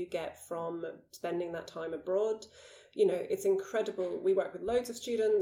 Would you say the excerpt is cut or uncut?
uncut